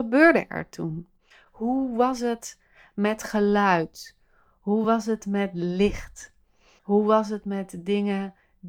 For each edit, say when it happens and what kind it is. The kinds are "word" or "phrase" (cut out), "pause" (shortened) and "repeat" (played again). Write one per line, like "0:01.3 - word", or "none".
none